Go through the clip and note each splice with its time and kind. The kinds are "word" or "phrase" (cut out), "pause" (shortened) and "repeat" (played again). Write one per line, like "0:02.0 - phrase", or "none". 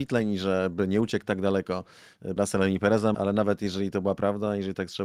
0:02.4 - word
0:03.1 - word